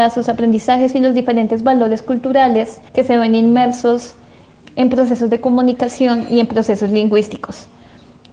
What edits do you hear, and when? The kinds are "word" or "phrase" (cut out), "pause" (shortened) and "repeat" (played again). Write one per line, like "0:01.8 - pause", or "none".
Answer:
0:02.9 - pause
0:04.6 - word